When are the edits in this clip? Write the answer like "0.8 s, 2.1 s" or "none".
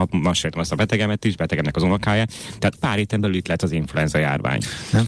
2.8 s